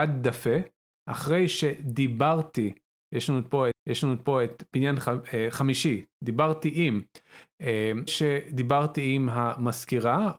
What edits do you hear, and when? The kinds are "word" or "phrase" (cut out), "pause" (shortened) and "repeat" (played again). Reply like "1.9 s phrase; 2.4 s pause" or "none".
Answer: 3.7 s repeat; 6.1 s word; 8.1 s word